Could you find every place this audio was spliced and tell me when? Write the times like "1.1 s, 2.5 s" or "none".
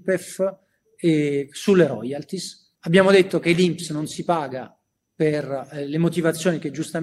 2.8 s